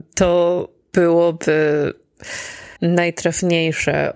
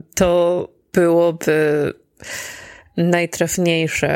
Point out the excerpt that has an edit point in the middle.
first; 1 cut; at 2.8 s

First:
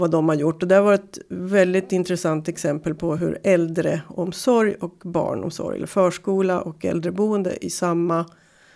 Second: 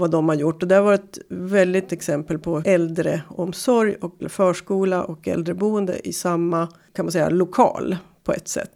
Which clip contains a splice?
second; 4 cuts; at 1.9 s, 2.6 s, 4.2 s, 6.9 s

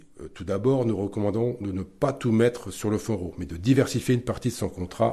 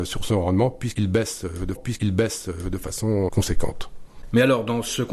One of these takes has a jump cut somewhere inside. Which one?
second; 1 cut; at 1.8 s

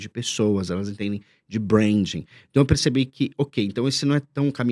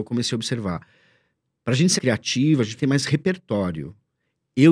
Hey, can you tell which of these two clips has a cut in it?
second; 2 cuts; at 2.0 s, 2.8 s

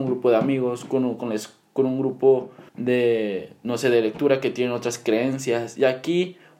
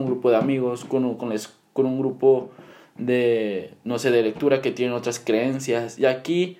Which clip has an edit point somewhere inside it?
first; 1 cut; at 2.7 s

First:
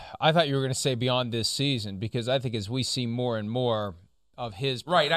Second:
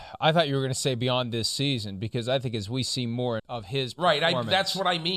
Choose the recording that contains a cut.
second; 1 cut; at 3.4 s

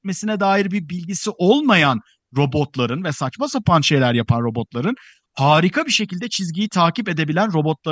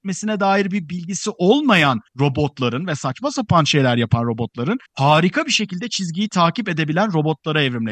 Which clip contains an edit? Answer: second; 2 cuts; at 2.1 s, 4.9 s

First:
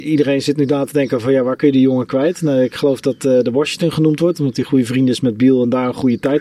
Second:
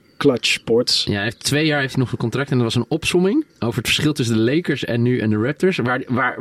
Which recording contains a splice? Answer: second; 1 cut; at 3.5 s

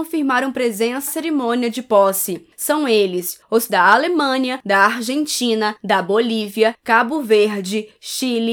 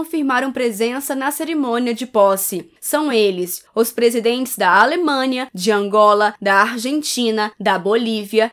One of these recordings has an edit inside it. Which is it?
first; 3 cuts; at 1.1 s, 3.7 s, 4.6 s

